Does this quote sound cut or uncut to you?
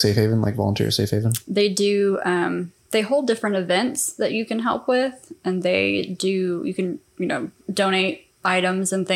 cut